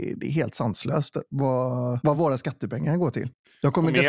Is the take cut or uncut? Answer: uncut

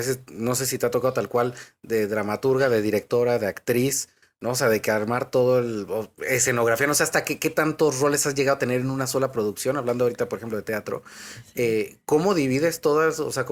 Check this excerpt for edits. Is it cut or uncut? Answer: uncut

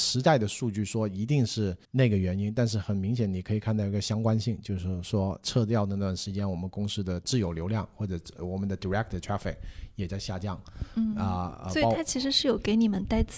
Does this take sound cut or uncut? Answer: cut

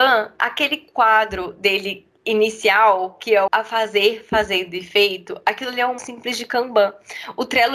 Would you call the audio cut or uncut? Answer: cut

